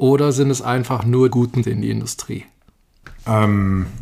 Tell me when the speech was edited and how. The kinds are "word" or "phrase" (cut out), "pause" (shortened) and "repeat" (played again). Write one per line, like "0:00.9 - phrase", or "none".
0:01.3 - word
0:01.6 - word